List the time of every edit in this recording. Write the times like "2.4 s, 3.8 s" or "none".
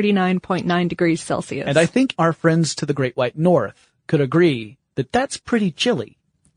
2.2 s

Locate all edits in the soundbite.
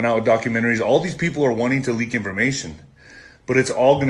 none

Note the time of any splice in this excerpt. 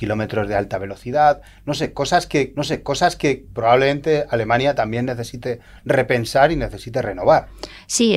2.6 s

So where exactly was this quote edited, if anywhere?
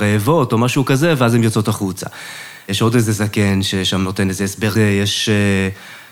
4.8 s

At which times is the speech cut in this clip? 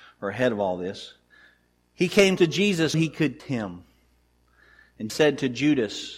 2.4 s, 2.9 s, 3.4 s, 5.1 s

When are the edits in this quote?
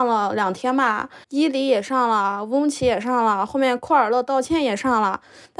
1.2 s

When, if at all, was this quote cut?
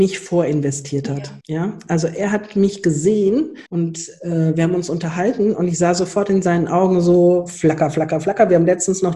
1.4 s, 3.7 s

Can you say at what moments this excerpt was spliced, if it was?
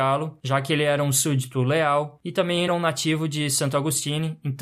2.7 s

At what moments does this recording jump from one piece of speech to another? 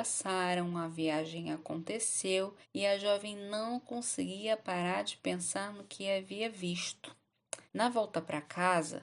2.6 s, 7.7 s

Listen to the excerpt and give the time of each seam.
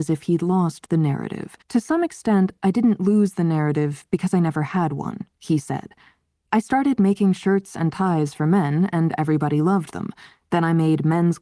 1.6 s

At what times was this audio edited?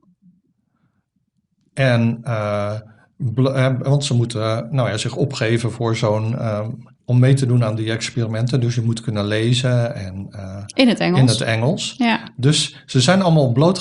6.9 s

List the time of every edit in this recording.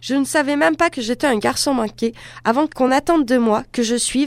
none

